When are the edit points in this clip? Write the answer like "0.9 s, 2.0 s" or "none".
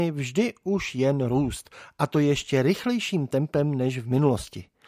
none